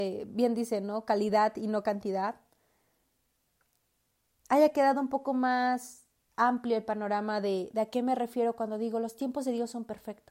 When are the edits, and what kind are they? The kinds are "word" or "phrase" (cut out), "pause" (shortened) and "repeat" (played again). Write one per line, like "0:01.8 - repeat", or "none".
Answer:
none